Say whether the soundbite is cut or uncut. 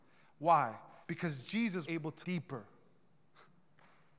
cut